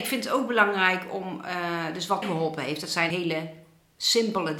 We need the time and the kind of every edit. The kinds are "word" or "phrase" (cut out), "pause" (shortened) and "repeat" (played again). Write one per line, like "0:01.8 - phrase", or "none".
0:02.2 - word
0:03.1 - word